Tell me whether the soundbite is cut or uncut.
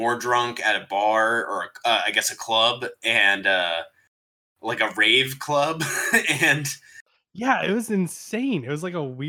uncut